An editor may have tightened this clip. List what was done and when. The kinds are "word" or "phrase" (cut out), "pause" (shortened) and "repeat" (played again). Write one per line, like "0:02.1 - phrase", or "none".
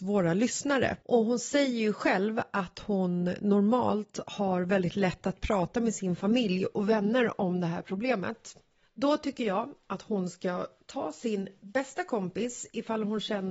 0:01.0 - pause